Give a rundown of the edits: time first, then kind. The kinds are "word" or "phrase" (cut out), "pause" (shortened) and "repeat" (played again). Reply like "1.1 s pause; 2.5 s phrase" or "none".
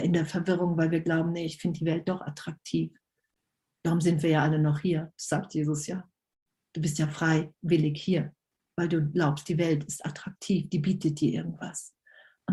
none